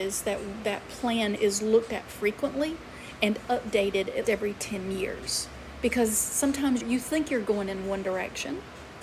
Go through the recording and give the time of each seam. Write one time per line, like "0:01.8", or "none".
0:01.4
0:04.2
0:06.8